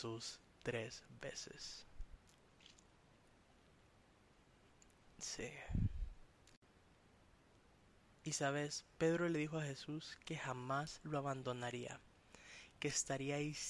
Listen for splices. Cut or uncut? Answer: uncut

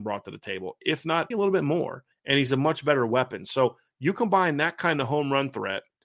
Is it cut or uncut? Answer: cut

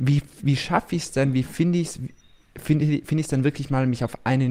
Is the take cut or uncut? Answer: uncut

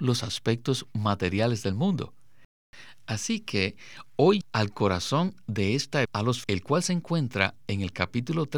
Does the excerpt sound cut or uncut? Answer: cut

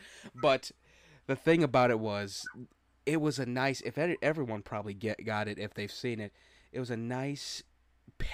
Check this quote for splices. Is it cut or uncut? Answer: uncut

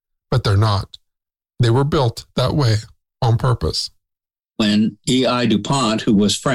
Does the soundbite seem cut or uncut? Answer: uncut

